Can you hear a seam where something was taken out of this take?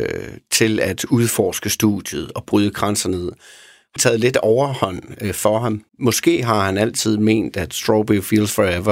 yes; 3 cuts; at 2.5 s, 4.0 s, 5.9 s

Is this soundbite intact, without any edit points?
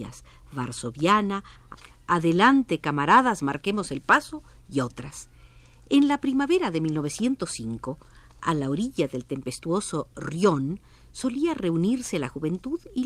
yes; 0 cuts

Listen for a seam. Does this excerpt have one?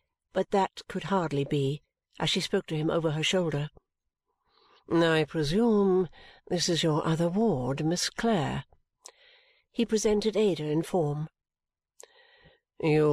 no; 0 cuts

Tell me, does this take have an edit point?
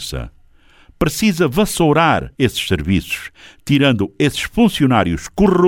yes; 1 cut; at 2.4 s

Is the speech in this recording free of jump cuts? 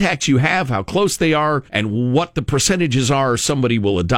no; 1 cut; at 1.7 s

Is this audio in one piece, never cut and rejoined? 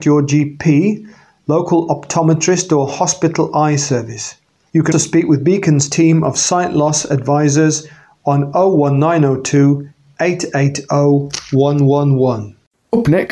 no; 1 cut; at 4.9 s

